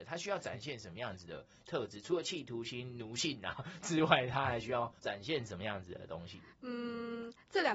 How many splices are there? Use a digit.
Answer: 2